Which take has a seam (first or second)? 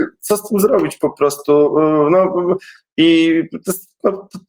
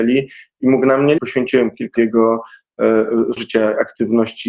second